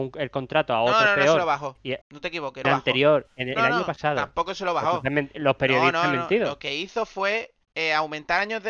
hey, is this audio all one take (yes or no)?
no